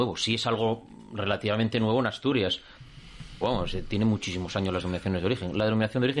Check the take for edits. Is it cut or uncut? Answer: cut